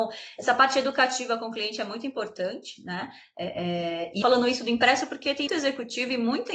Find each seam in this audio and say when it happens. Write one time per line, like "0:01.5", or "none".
0:04.2
0:05.5